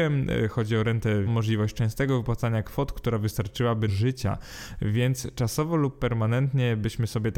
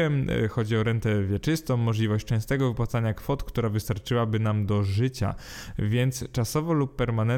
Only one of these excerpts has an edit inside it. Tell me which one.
first; 2 cuts; at 1.3 s, 3.9 s

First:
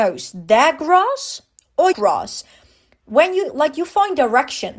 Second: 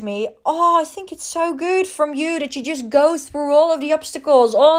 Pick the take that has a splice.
first; 1 cut; at 1.9 s

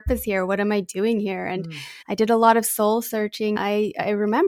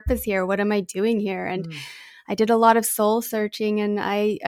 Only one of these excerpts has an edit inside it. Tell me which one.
first; 2 cuts; at 2.0 s, 3.6 s

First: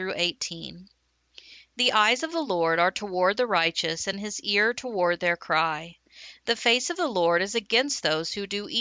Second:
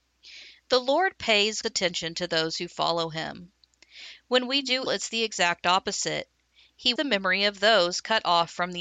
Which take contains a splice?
second; 3 cuts; at 1.6 s, 4.9 s, 7.0 s

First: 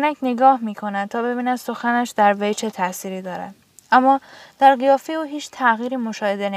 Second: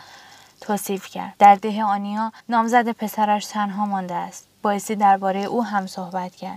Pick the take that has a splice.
second; 2 cuts; at 1.4 s, 2.4 s

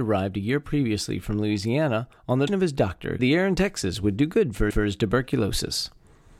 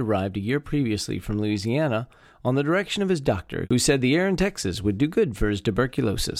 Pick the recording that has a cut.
first; 4 cuts; at 2.2 s, 2.5 s, 3.2 s, 4.7 s

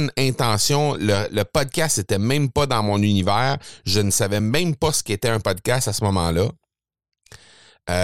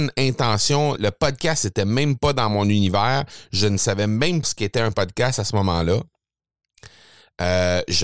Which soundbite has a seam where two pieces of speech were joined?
second; 2 cuts; at 1.0 s, 4.4 s

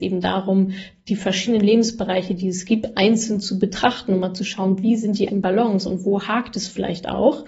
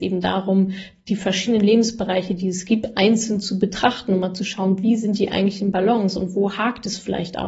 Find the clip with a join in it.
first; 1 cut; at 5.3 s

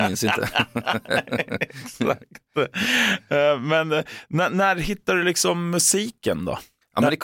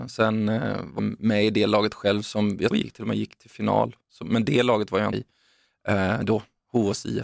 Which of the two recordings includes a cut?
second; 3 cuts; at 1.0 s, 2.7 s, 5.1 s

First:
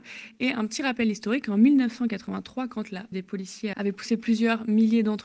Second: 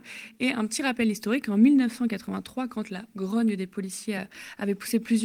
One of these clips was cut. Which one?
first; 2 cuts; at 3.1 s, 3.7 s

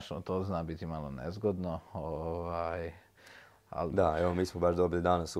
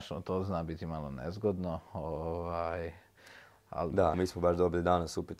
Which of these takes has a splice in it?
second; 1 cut; at 4.1 s

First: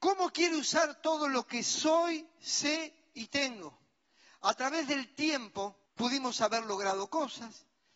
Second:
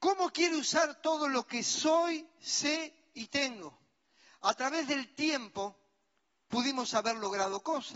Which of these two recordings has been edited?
first; 1 cut; at 5.9 s

